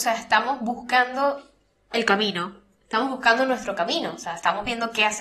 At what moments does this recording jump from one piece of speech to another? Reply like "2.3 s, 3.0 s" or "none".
none

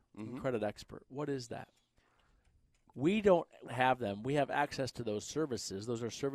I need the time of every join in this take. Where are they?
3.7 s

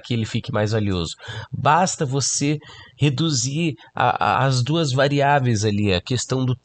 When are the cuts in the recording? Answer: 4.3 s

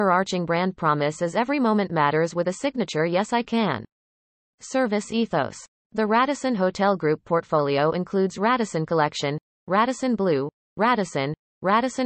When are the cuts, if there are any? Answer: none

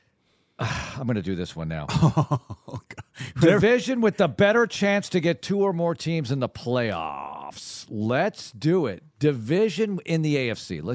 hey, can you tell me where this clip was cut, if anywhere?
none

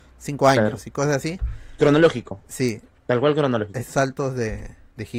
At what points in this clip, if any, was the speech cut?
3.9 s

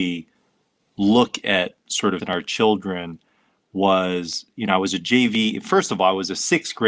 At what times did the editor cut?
2.2 s

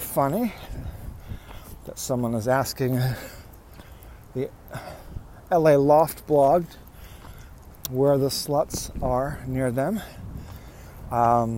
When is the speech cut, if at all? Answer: none

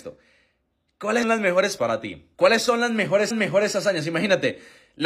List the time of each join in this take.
1.2 s, 1.8 s, 2.3 s, 3.3 s

